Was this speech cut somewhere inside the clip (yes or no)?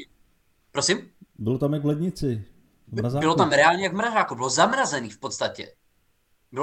no